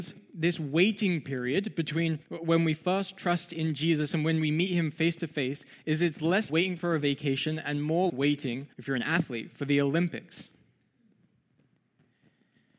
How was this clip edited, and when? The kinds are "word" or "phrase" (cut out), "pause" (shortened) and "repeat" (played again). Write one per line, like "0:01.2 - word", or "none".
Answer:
0:02.2 - pause
0:06.5 - word
0:08.1 - word
0:08.7 - pause